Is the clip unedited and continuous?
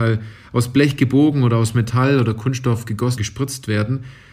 no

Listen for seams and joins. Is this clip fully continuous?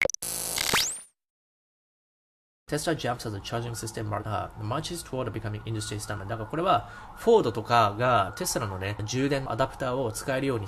yes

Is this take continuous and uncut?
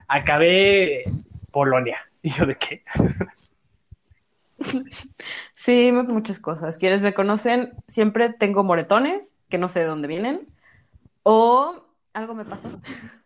no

